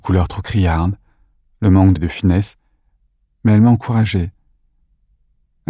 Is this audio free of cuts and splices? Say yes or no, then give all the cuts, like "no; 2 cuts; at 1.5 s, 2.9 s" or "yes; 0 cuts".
no; 1 cut; at 2.0 s